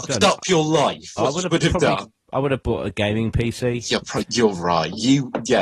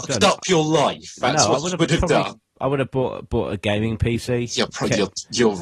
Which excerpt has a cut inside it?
first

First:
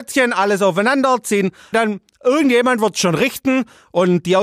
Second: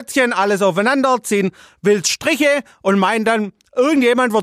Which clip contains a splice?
first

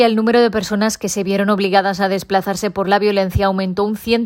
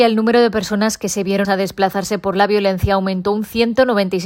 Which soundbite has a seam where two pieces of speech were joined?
second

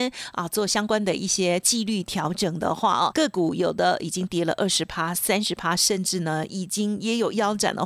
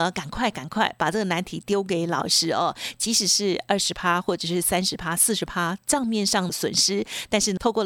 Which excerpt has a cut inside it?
first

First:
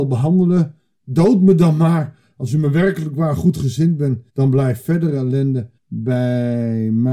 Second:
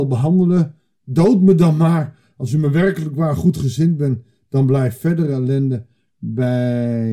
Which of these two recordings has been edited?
first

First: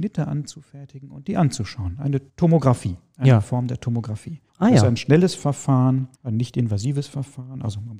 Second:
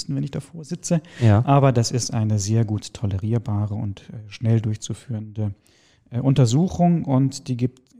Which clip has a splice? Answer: first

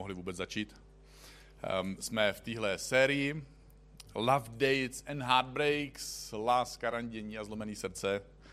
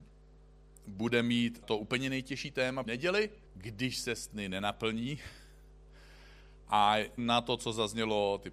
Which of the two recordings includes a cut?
second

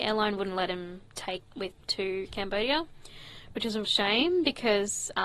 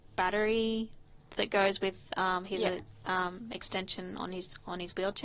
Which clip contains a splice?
first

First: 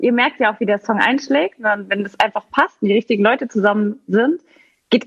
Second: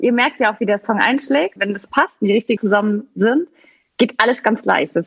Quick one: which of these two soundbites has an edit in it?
second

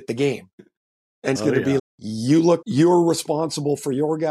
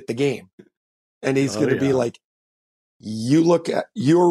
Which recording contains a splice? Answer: first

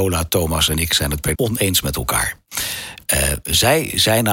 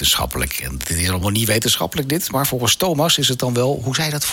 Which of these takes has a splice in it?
first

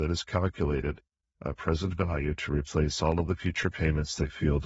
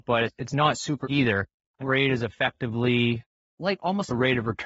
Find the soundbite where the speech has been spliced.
second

